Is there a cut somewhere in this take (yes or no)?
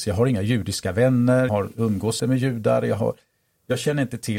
yes